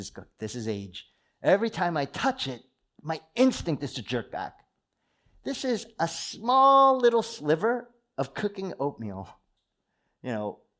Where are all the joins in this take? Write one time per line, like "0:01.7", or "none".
none